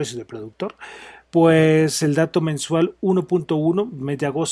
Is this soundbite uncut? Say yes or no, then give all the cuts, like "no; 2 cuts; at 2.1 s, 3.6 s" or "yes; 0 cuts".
yes; 0 cuts